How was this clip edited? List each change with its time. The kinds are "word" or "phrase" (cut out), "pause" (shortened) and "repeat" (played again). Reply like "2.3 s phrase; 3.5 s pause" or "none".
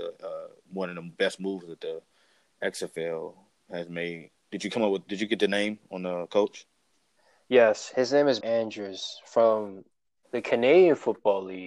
8.4 s word